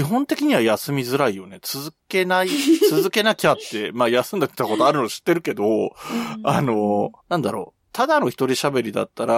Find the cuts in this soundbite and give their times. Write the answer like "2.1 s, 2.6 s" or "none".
7.2 s